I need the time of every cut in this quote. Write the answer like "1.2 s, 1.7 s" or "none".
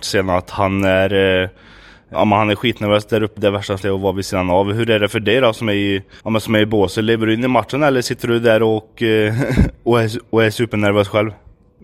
2.1 s, 3.4 s, 3.8 s, 6.2 s